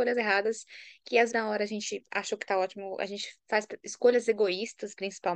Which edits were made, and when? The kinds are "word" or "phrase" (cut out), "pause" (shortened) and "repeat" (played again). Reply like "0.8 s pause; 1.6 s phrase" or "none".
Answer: 1.3 s word